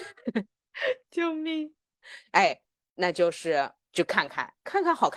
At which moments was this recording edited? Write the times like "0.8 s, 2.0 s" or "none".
none